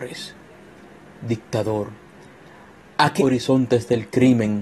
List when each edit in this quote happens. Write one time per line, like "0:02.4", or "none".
0:03.2